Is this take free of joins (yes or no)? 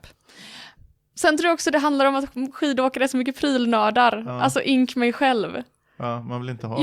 yes